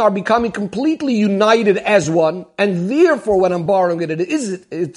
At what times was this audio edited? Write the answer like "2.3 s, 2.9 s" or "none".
none

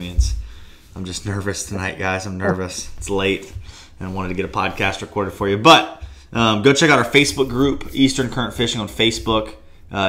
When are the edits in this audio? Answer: none

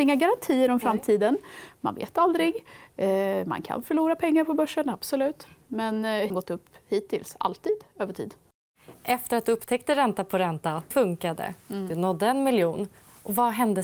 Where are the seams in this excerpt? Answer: 6.3 s, 10.9 s

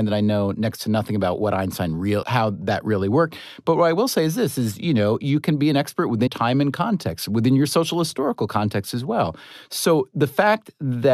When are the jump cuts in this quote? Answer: 2.2 s, 6.3 s

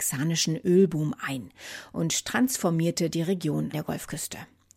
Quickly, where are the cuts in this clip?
3.7 s

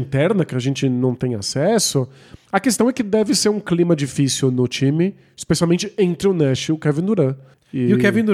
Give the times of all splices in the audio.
2.4 s

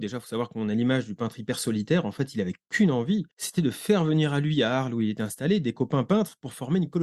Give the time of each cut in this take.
3.3 s

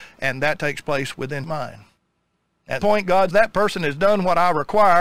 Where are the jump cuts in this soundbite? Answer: 1.4 s, 2.8 s, 3.3 s

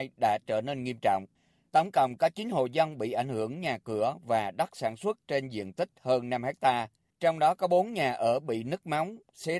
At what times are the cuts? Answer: 5.2 s, 7.1 s

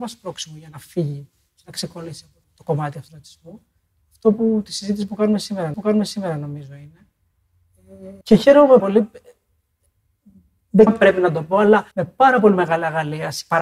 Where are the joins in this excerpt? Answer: 2.4 s, 3.1 s, 5.7 s, 8.2 s, 8.8 s, 10.9 s, 11.9 s

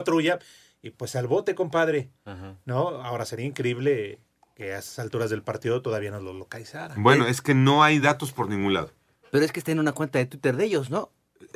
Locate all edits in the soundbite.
none

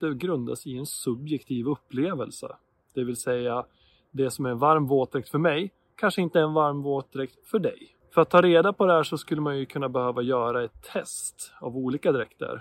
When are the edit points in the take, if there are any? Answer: none

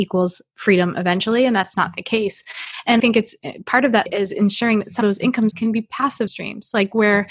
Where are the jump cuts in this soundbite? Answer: 1.7 s, 3.0 s, 4.1 s, 5.0 s, 5.5 s, 6.3 s

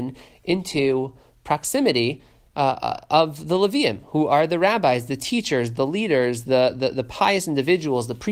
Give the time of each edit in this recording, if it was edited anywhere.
none

